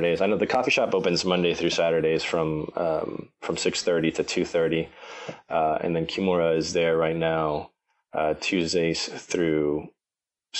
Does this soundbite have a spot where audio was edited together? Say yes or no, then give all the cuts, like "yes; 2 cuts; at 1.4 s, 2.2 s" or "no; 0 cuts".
no; 0 cuts